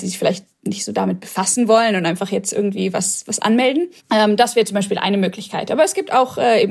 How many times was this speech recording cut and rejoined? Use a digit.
1